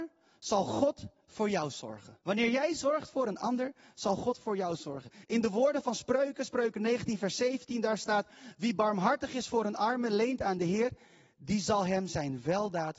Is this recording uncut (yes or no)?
no